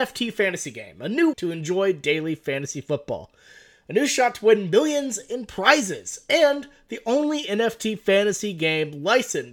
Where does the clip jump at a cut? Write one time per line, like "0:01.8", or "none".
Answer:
0:01.3